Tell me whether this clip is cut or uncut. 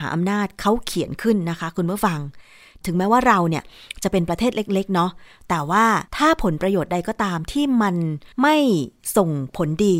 cut